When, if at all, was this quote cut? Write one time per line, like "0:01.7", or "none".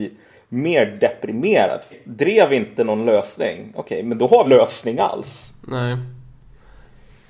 0:01.9
0:04.5